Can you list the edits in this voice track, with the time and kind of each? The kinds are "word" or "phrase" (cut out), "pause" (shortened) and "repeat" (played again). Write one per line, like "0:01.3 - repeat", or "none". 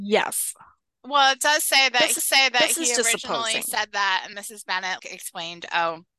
0:02.2 - repeat
0:04.3 - word
0:05.0 - word